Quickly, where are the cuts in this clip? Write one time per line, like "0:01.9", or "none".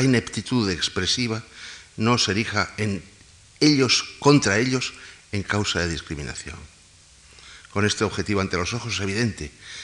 none